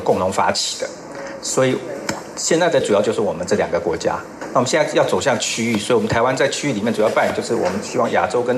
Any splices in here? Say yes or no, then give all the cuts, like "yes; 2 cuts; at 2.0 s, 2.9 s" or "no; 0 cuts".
yes; 1 cut; at 2.8 s